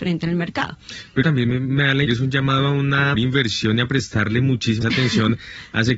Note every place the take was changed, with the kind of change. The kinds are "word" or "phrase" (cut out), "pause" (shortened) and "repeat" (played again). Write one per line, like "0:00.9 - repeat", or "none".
0:01.2 - word
0:02.1 - word
0:03.1 - word
0:04.8 - word